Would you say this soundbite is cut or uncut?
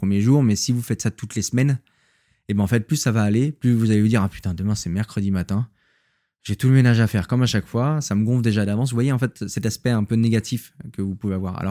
uncut